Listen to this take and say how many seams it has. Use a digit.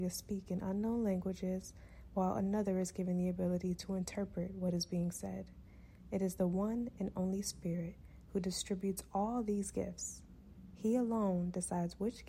0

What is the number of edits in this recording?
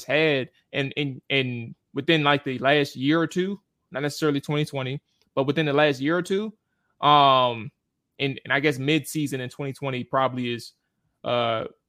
0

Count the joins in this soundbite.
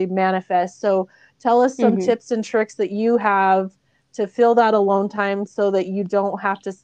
0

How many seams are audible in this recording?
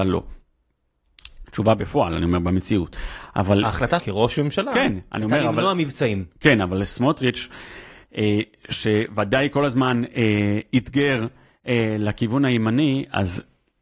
1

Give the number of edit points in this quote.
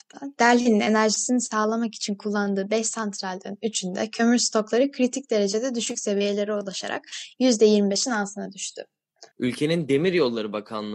1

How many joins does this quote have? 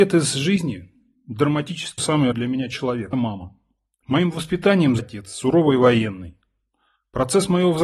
4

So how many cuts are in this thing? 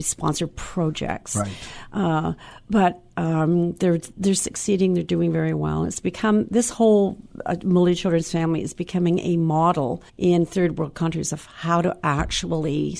1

